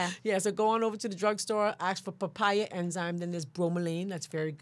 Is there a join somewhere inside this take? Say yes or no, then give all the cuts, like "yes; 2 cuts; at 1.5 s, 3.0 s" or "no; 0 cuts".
no; 0 cuts